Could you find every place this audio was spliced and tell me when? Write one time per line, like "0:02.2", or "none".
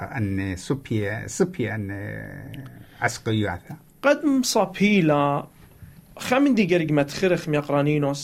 none